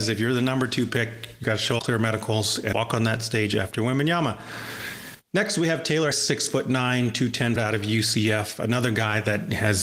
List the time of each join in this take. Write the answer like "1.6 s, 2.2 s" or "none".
1.4 s, 1.8 s, 2.7 s, 3.7 s, 6.1 s, 7.6 s